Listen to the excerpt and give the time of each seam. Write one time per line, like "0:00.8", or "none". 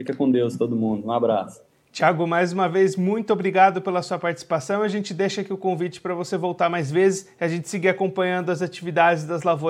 none

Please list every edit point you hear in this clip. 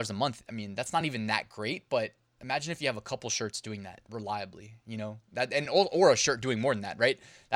none

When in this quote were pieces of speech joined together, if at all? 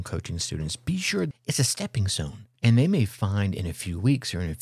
0:01.3
0:02.6

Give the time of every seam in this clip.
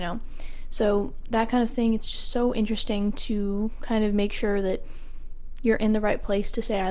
none

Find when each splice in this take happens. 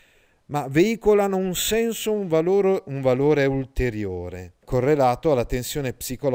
0:04.6

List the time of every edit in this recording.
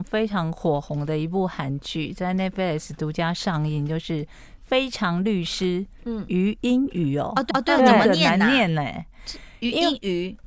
0:07.5

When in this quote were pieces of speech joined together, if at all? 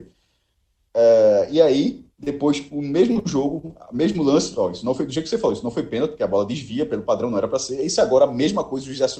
0:02.1

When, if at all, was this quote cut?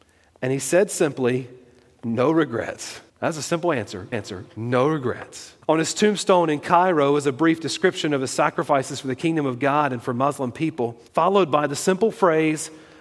0:03.1
0:04.1
0:05.6
0:11.1

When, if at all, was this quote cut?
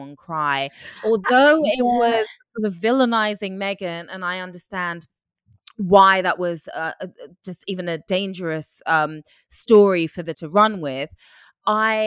0:10.3

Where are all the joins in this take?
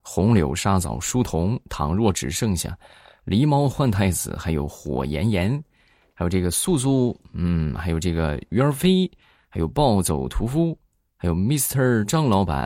none

